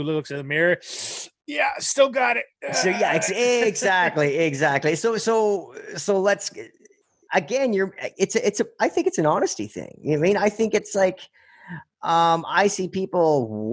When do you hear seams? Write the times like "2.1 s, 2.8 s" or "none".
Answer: none